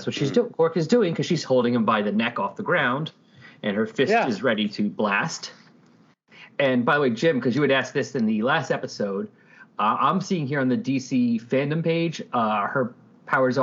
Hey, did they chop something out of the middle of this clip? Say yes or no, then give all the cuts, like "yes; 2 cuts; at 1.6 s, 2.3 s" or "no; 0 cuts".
no; 0 cuts